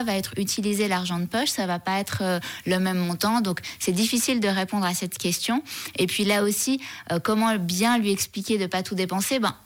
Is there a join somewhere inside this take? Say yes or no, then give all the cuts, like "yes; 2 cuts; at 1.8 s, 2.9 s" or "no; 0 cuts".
no; 0 cuts